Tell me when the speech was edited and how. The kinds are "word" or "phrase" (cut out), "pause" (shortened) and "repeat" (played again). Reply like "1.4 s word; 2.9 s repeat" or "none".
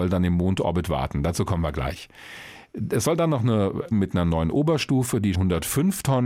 3.9 s phrase; 5.3 s word